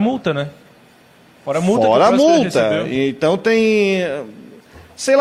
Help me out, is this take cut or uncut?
uncut